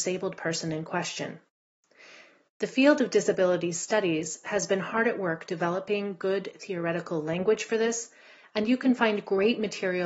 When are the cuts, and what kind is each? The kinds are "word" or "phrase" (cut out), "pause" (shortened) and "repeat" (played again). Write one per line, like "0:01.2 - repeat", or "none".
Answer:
none

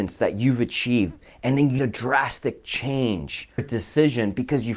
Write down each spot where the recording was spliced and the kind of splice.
0:01.8 - word
0:03.6 - word

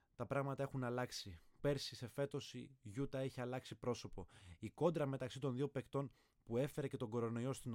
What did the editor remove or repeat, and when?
0:01.6 - word

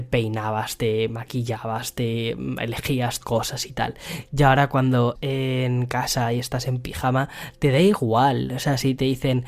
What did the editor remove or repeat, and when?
0:03.2 - word
0:05.2 - word

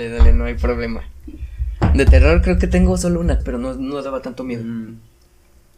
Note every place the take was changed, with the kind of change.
0:03.4 - word

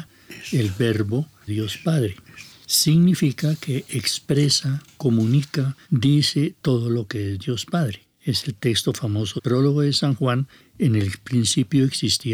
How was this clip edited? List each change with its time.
0:01.5 - phrase
0:05.8 - pause
0:09.4 - word

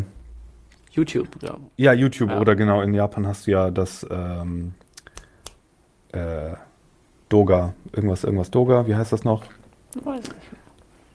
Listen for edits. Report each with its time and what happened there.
none

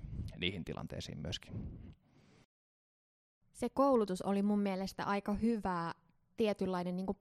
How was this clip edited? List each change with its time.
none

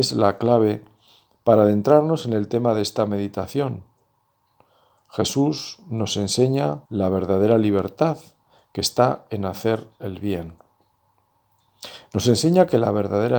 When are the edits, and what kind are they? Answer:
0:06.9 - pause

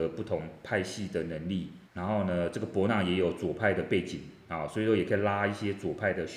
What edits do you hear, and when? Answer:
0:01.8 - pause

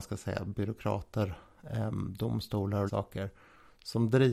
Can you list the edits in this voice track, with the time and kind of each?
0:02.9 - word

